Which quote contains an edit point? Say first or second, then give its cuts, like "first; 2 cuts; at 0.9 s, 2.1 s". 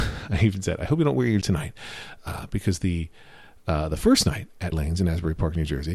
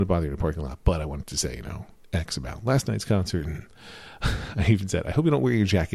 first; 2 cuts; at 1.4 s, 4.7 s